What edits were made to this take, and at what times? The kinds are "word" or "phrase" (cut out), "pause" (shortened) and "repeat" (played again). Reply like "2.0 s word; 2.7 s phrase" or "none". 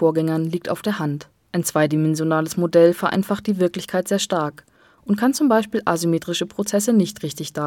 none